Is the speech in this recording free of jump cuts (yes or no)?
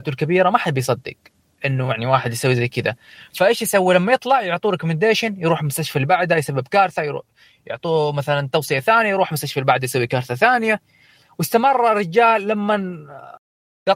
yes